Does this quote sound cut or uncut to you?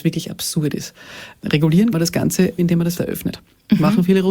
cut